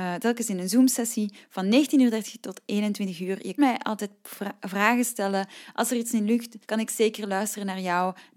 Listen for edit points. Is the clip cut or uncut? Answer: cut